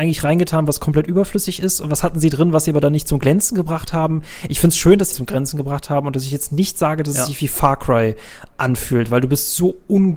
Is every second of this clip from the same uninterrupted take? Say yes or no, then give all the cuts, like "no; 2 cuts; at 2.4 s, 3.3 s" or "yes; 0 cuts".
no; 1 cut; at 5.1 s